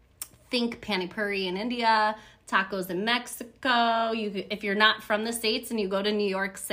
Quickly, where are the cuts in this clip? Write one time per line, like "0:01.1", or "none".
none